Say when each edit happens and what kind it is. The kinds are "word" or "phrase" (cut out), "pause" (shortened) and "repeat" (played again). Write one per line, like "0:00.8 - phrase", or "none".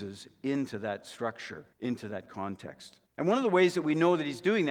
0:01.7 - pause
0:03.1 - pause